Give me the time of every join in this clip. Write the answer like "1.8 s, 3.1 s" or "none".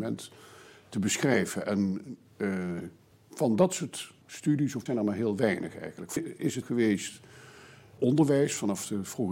3.1 s, 4.2 s, 4.9 s, 6.2 s, 6.6 s, 8.0 s